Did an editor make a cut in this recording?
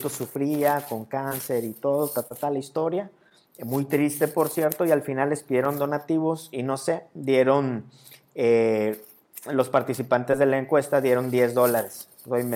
no; 0 cuts

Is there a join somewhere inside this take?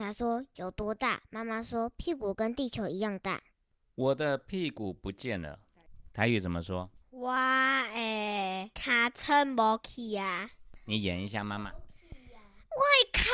yes; 1 cut; at 7.0 s

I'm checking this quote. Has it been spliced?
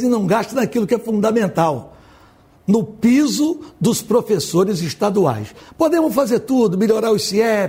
no; 0 cuts

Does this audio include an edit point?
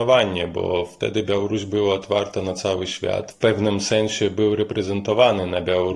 yes; 1 cut; at 3.3 s

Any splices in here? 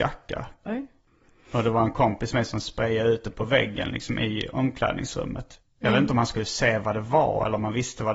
no; 0 cuts

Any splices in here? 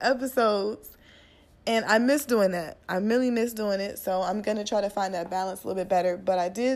no; 0 cuts

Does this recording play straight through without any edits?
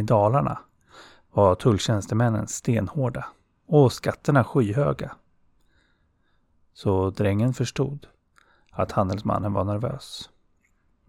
yes; 0 cuts

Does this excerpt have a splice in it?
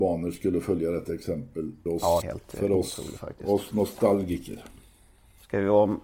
yes; 2 cuts; at 1.9 s, 2.2 s

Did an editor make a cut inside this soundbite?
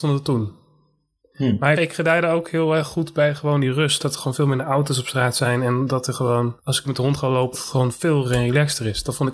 yes; 4 cuts; at 1.7 s, 6.8 s, 7.5 s, 8.2 s

